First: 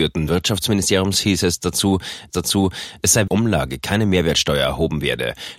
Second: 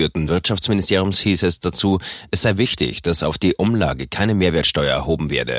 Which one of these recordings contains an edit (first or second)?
first